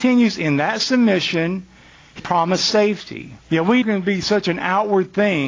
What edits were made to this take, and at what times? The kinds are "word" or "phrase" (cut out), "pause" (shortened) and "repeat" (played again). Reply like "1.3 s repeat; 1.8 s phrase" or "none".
2.2 s word; 3.4 s pause; 3.8 s phrase